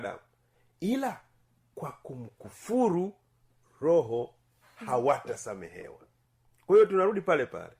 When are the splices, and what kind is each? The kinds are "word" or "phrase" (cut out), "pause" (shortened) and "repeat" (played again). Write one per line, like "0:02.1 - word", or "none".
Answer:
none